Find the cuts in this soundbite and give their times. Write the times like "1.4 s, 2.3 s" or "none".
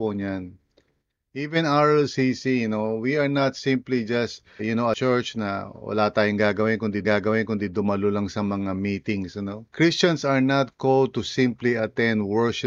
4.6 s, 7.0 s, 9.7 s

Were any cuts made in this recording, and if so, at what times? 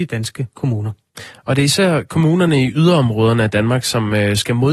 none

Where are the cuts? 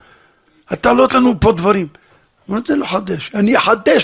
1.1 s

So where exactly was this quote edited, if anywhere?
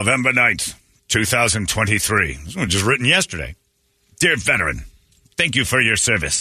none

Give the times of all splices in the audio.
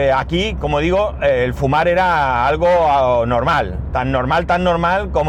none

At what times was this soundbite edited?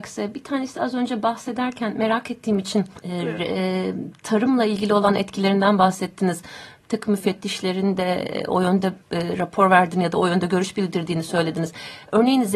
3.0 s, 9.0 s

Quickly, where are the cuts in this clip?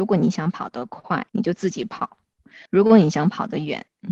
1.3 s, 2.7 s

